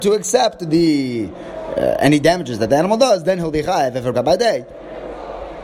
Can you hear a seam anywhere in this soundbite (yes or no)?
yes